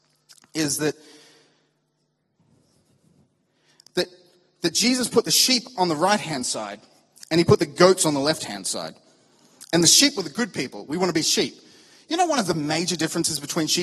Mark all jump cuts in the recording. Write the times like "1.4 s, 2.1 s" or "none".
none